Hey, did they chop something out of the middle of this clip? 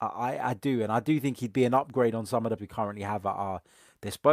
yes; 1 cut; at 2.6 s

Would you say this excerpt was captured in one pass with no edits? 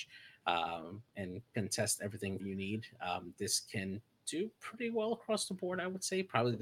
no; 1 cut; at 2.4 s

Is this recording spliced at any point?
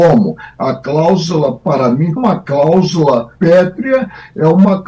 yes; 2 cuts; at 2.2 s, 3.4 s

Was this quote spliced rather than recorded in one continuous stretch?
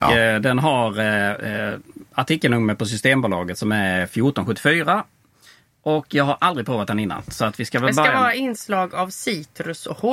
no; 0 cuts

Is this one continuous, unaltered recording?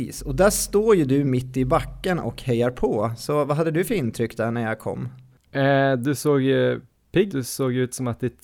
no; 1 cut; at 7.3 s

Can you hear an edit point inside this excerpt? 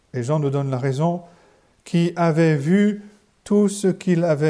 no; 0 cuts

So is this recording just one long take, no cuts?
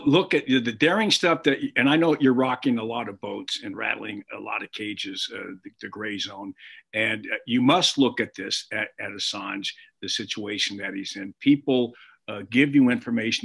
yes; 0 cuts

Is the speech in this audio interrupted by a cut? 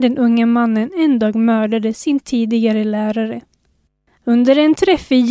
no; 0 cuts

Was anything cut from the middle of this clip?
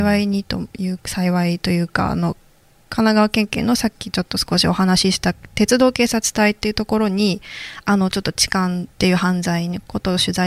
yes; 1 cut; at 8.9 s

